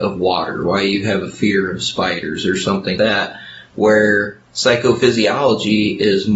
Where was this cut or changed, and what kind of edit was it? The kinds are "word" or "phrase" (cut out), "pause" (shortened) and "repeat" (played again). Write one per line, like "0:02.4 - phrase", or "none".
0:03.0 - word